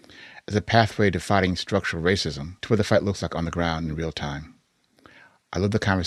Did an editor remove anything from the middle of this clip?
yes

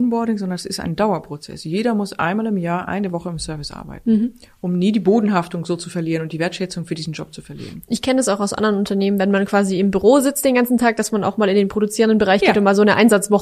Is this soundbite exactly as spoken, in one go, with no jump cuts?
yes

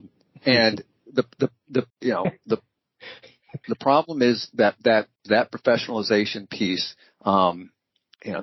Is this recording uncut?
no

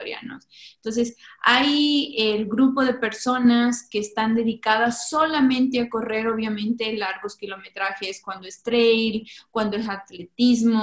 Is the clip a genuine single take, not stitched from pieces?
yes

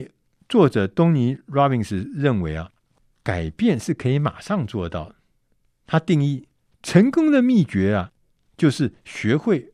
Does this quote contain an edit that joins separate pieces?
no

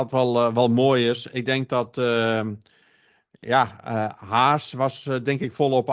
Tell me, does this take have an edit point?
no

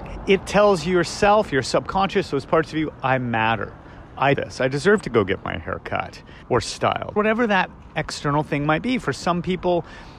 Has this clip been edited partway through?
yes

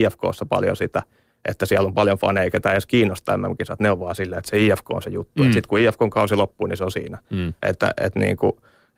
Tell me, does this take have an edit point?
no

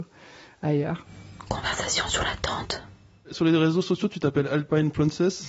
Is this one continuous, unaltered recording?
yes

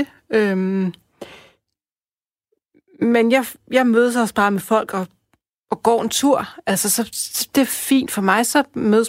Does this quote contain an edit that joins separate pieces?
no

